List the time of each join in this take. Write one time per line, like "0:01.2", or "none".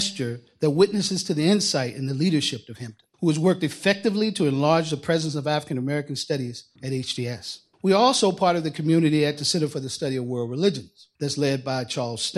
0:03.1
0:06.8
0:07.7
0:11.1

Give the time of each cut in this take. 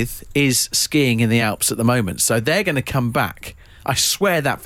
none

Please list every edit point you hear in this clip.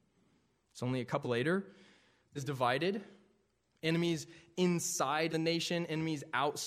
0:01.2
0:02.4
0:05.3

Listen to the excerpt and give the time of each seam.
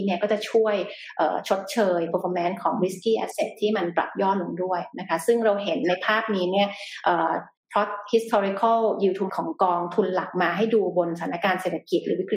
0:09.3

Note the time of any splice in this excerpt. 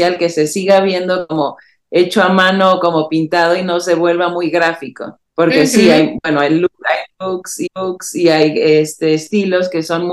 0:05.3
0:07.7

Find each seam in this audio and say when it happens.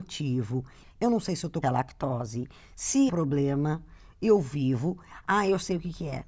0:01.6
0:03.1

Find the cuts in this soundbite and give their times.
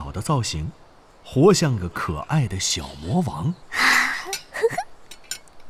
0:03.6

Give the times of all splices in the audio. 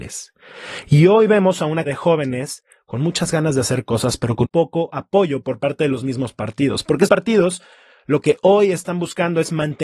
0:01.9
0:04.4
0:07.1

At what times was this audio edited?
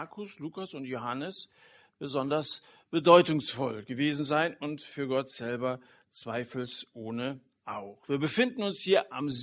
none

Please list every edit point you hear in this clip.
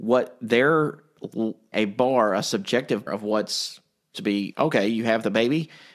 0:01.7
0:03.1
0:04.1
0:04.5

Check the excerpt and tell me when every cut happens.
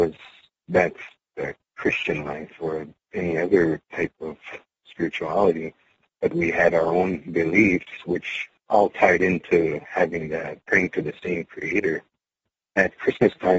none

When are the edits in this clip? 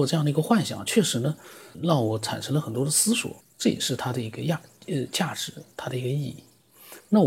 0:01.7
0:03.4

